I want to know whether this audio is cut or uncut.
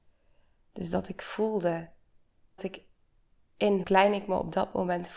cut